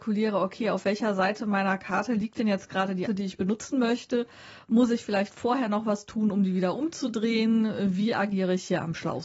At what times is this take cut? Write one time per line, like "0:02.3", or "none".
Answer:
0:03.1